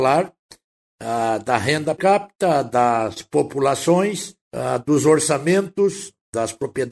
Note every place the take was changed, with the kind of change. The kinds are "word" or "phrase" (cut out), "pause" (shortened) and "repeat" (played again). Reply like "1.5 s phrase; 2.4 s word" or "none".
2.0 s word; 4.4 s pause